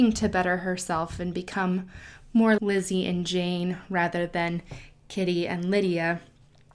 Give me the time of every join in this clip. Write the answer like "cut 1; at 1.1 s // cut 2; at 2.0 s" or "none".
cut 1; at 2.6 s